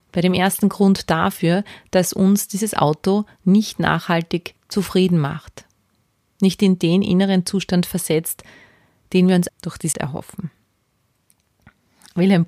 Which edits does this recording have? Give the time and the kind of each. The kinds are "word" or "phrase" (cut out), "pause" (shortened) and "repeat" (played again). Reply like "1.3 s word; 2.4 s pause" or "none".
9.5 s word; 9.9 s word